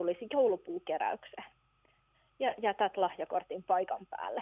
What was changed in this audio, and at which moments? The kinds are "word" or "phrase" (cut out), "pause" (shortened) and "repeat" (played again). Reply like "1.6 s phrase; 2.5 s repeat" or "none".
none

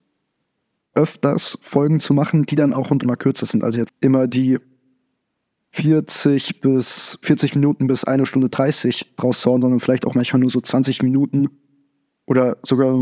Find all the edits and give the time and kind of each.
0.9 s word; 3.0 s word; 3.9 s word; 9.2 s word

